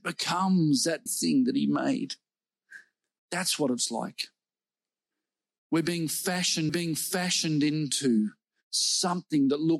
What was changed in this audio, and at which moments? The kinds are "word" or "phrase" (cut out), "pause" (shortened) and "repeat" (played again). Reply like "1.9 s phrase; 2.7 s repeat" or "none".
1.1 s word; 3.1 s pause; 6.7 s repeat